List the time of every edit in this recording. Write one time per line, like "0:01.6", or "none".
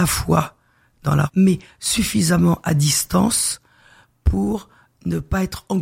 0:00.9
0:01.3